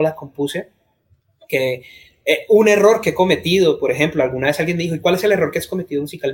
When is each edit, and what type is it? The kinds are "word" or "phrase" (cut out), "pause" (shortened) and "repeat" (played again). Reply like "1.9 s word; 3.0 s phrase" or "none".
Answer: none